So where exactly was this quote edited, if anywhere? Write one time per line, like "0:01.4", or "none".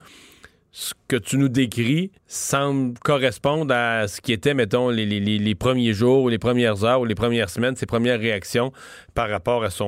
0:02.2